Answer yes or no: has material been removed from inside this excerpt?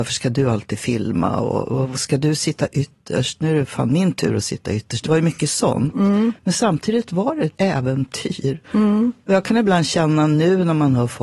yes